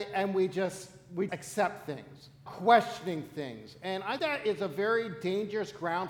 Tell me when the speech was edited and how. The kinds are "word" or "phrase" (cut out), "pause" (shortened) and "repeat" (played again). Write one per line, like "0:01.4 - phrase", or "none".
0:01.3 - word
0:02.5 - word
0:04.2 - word